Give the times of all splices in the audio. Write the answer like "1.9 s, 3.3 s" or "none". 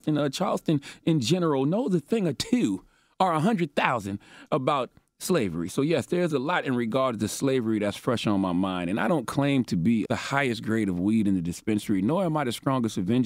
10.1 s